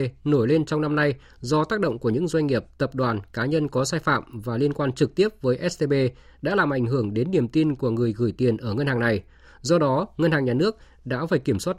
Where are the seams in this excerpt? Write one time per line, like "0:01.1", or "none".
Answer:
none